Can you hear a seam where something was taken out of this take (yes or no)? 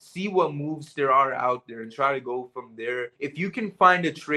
yes